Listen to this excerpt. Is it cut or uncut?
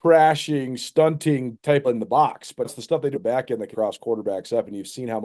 cut